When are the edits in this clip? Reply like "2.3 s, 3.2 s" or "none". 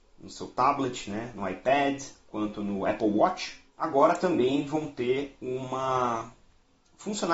3.7 s